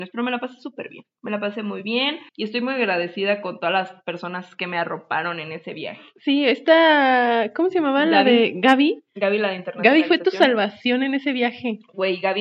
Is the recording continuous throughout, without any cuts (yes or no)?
no